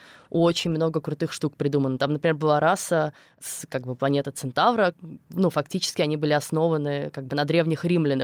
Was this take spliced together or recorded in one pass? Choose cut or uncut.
uncut